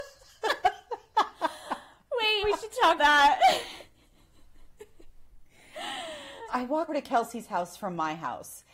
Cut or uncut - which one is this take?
cut